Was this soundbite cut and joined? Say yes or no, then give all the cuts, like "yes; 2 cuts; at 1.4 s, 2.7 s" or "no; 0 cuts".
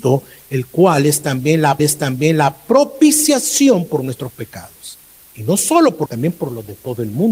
yes; 3 cuts; at 1.8 s, 5.2 s, 6.1 s